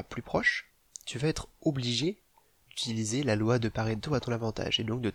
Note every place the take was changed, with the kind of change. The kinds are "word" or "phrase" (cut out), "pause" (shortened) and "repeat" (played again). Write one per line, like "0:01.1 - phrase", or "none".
none

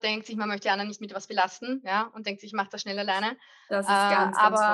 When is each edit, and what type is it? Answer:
none

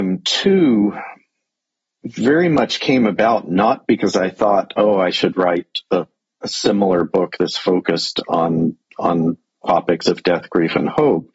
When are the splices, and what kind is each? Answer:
none

